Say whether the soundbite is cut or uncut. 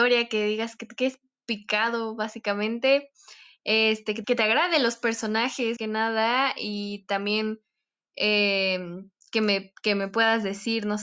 cut